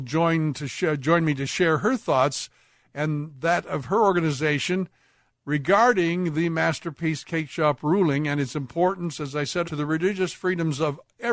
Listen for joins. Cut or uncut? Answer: cut